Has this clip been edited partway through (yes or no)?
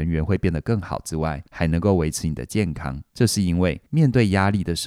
yes